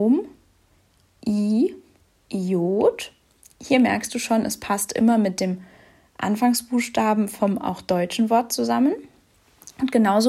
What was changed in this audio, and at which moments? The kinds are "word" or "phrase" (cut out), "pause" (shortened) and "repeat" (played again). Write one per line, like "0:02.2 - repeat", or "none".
none

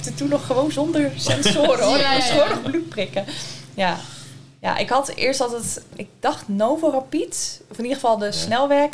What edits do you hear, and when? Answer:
none

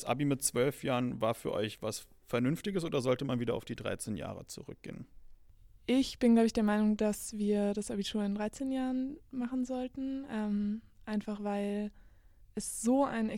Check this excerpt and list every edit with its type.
0:12.4 - pause

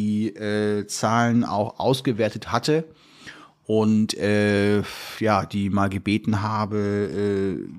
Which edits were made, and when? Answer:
none

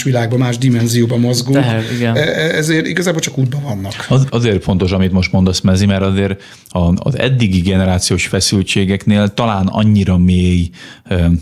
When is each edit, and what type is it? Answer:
0:04.3 - word

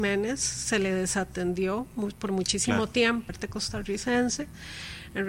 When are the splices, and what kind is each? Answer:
0:03.3 - phrase

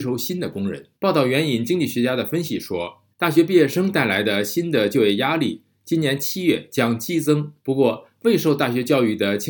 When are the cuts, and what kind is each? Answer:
0:00.9 - pause
0:03.1 - pause
0:07.6 - pause

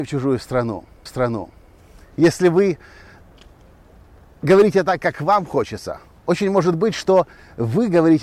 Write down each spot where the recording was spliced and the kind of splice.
0:01.1 - repeat

